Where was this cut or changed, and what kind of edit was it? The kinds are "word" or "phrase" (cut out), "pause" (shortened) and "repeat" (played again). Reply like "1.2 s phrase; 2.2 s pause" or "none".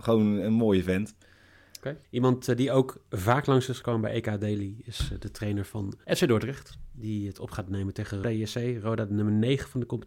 2.0 s pause; 6.0 s pause; 8.2 s word

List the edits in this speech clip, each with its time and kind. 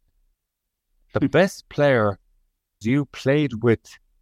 2.8 s word

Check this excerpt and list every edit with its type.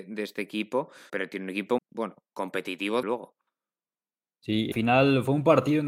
1.1 s word; 1.8 s word; 3.0 s word; 4.7 s word

